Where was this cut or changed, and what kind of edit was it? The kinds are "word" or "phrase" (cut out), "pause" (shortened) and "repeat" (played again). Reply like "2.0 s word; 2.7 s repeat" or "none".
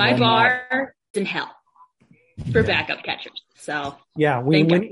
1.1 s word; 3.5 s pause